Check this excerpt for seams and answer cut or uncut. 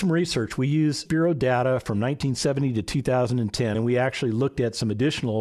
cut